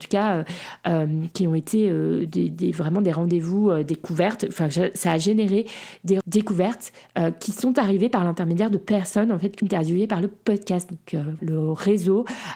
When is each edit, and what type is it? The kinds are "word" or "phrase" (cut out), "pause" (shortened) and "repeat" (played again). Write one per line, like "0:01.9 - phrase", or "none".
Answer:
0:02.3 - word
0:06.2 - word
0:09.6 - word
0:11.4 - word